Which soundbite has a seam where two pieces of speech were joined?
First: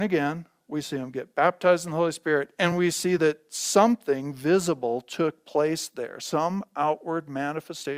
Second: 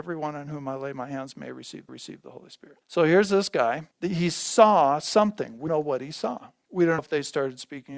second; 5 cuts; at 1.9 s, 2.8 s, 3.9 s, 5.7 s, 7.0 s

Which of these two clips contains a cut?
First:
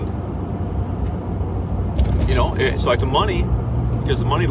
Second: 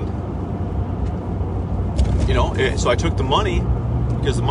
first; 1 cut; at 3.0 s

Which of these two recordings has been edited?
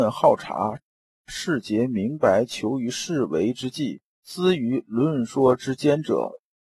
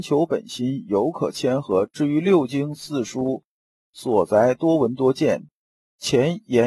first; 1 cut; at 4.1 s

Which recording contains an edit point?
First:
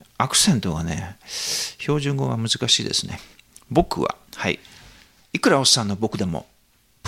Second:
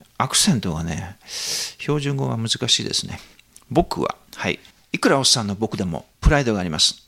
second; 2 cuts; at 4.7 s, 6.1 s

